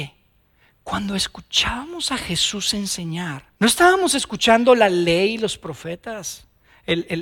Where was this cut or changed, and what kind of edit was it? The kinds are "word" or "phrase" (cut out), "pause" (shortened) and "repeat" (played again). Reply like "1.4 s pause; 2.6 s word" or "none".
3.5 s pause